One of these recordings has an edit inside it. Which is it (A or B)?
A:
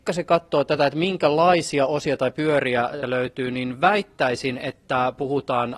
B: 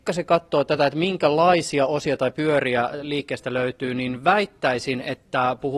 A